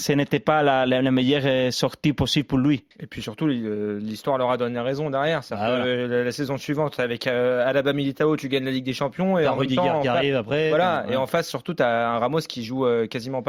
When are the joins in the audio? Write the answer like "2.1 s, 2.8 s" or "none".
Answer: 2.9 s

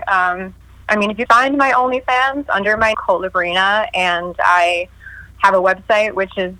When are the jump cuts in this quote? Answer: 1.3 s, 2.5 s, 2.9 s

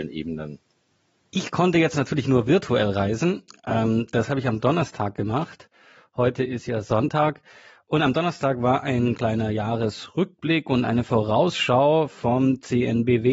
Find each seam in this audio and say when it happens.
none

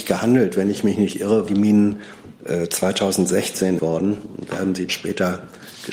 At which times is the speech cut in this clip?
1.5 s, 3.8 s, 4.5 s, 4.9 s

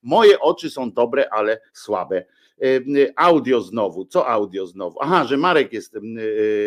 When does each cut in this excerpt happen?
1.7 s

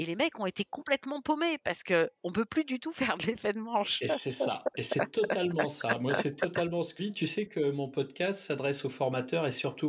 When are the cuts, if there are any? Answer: 7.0 s

